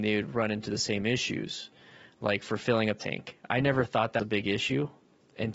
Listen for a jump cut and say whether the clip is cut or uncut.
cut